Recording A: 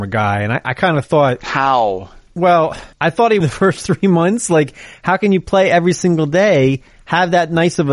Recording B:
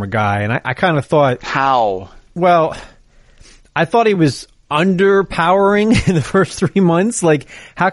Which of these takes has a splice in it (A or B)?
A